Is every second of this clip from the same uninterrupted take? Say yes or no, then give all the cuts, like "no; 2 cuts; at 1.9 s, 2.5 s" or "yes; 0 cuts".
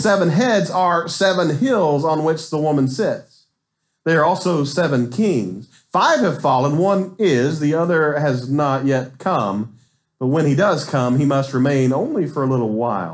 yes; 0 cuts